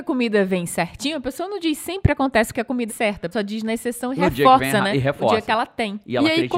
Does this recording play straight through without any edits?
no; 3 cuts; at 2.5 s, 2.9 s, 3.3 s

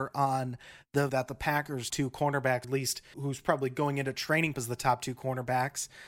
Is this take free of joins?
no; 5 cuts; at 1.1 s, 1.9 s, 2.6 s, 3.1 s, 4.5 s

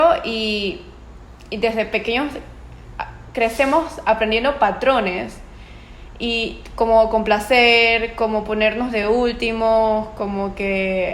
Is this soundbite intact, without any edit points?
yes; 0 cuts

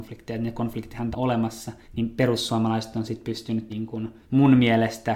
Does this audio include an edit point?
yes; 4 cuts; at 1.1 s, 1.8 s, 3.7 s, 4.2 s

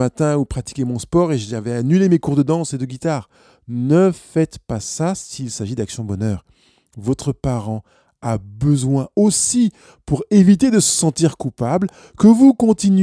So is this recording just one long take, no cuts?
yes; 0 cuts

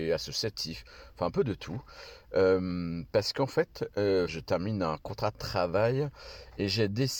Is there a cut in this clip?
yes; 1 cut; at 4.3 s

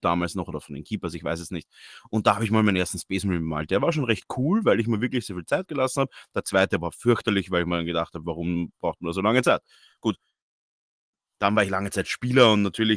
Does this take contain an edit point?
no; 0 cuts

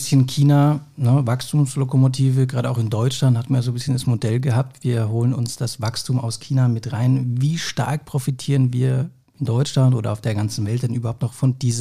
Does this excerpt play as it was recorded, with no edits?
yes; 0 cuts

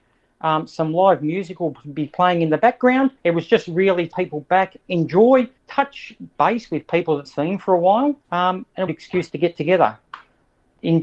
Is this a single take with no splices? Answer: no; 6 cuts; at 3.2 s, 4.1 s, 5.6 s, 7.3 s, 8.2 s, 8.9 s

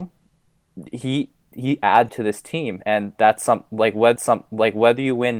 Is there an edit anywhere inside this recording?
yes; 2 cuts; at 2.1 s, 4.2 s

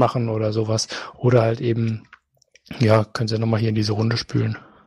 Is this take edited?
no; 0 cuts

